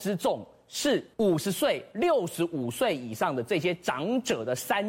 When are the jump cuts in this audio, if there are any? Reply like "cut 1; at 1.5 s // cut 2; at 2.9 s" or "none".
cut 1; at 1.1 s

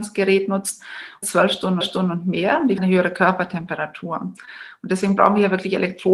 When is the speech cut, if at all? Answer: cut 1; at 1.2 s // cut 2; at 1.8 s // cut 3; at 2.8 s

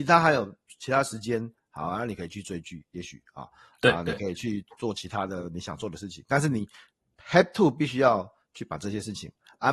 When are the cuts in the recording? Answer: none

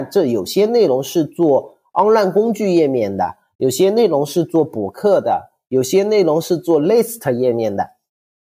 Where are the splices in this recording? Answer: none

